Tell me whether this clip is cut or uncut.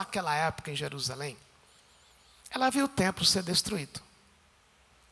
uncut